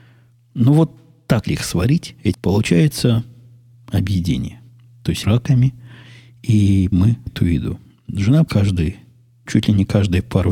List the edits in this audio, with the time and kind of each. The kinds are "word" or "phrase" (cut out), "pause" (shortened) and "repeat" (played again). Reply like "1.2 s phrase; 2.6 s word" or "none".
1.5 s word; 2.3 s word; 5.2 s word; 6.9 s word; 7.3 s word; 8.5 s word; 9.5 s word